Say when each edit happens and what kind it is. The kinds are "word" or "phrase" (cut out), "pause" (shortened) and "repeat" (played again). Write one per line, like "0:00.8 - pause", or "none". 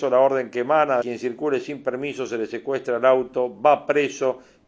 0:01.0 - phrase